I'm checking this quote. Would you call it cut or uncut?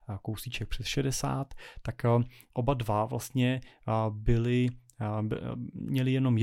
uncut